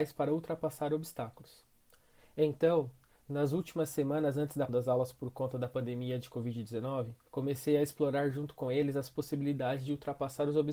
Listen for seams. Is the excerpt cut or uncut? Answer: cut